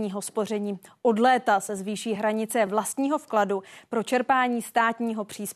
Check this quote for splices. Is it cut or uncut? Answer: uncut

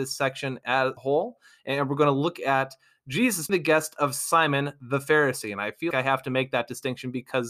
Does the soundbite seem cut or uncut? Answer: cut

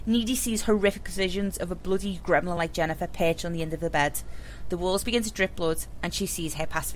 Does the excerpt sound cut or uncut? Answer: uncut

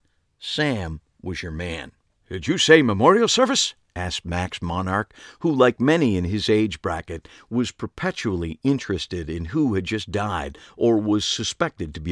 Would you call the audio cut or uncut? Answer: uncut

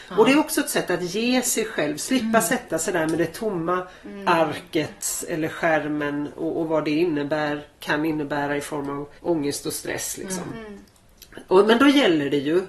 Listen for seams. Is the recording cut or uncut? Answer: cut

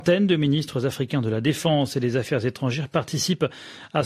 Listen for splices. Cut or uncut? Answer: uncut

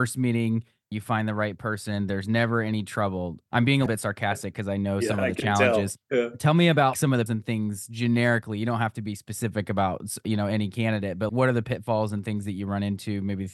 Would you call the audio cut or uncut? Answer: cut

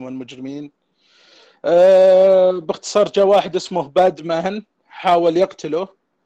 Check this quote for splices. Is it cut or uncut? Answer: uncut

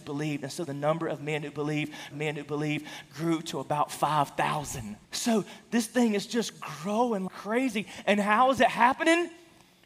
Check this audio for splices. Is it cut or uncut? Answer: cut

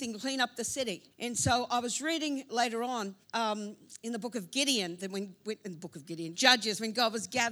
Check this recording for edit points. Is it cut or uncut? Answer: cut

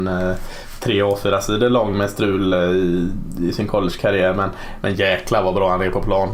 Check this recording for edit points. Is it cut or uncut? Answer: uncut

